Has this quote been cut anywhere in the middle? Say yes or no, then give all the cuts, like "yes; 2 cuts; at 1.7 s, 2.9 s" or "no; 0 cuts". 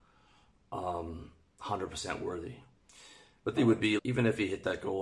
yes; 2 cuts; at 3.6 s, 4.0 s